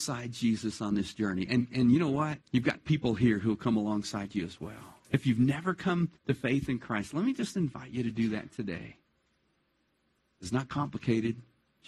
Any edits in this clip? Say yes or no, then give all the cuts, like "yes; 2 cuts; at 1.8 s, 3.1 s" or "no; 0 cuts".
yes; 3 cuts; at 2.4 s, 5.0 s, 6.2 s